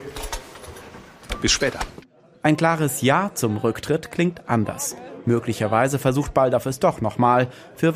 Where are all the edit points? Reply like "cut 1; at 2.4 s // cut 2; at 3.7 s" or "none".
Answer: none